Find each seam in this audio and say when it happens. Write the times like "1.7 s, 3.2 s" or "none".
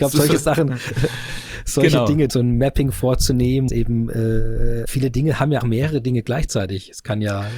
2.3 s, 3.7 s, 4.9 s, 5.6 s

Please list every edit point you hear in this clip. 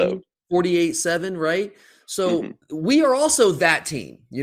2.6 s

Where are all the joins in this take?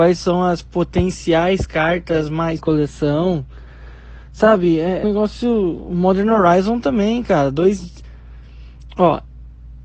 2.6 s, 5.0 s

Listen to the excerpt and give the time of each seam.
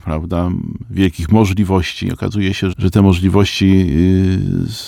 2.7 s

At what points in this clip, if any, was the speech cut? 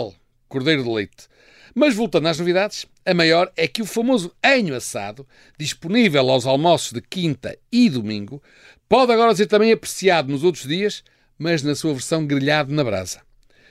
none

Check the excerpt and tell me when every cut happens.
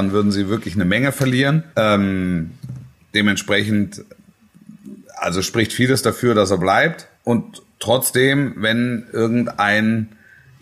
1.7 s, 7.1 s

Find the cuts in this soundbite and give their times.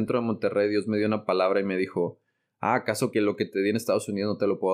3.1 s

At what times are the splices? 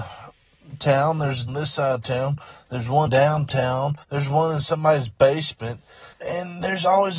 1.5 s, 3.1 s, 4.0 s, 6.1 s

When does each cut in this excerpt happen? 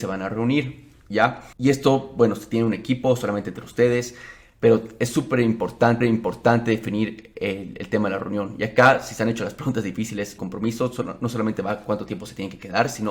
1.5 s, 6.0 s, 10.4 s

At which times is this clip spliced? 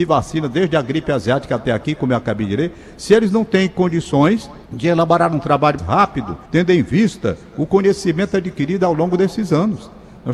4.7 s, 5.8 s, 6.5 s

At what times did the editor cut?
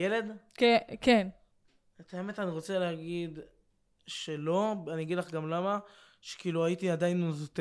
none

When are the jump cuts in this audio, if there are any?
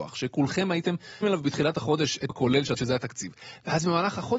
1.2 s, 2.3 s, 2.8 s

